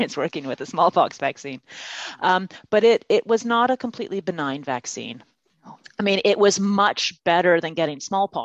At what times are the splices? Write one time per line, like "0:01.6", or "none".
none